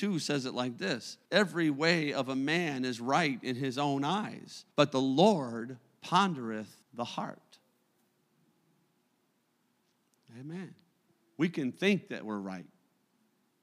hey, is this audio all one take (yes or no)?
no